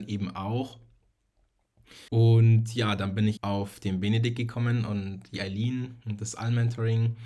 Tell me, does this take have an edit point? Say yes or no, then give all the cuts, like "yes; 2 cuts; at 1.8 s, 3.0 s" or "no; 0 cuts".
yes; 2 cuts; at 2.1 s, 3.4 s